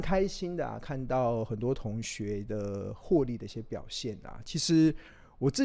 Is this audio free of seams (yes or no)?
yes